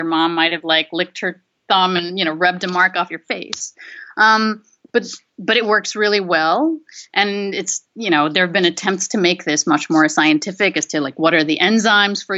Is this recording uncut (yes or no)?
yes